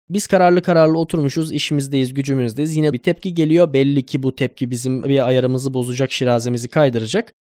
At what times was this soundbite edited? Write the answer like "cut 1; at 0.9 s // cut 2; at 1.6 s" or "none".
cut 1; at 2.9 s